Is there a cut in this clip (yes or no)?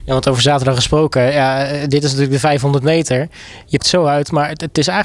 yes